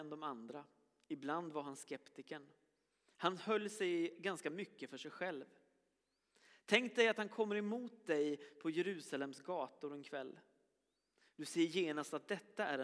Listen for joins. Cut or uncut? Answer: uncut